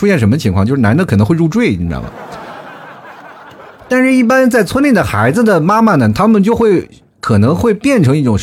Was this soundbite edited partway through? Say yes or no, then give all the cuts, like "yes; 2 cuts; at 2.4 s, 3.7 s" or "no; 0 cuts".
no; 0 cuts